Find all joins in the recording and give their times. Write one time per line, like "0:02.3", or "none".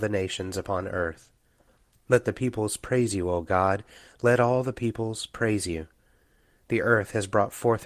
none